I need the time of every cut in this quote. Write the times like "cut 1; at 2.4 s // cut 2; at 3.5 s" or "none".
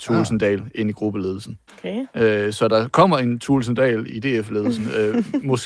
cut 1; at 1.7 s // cut 2; at 4.1 s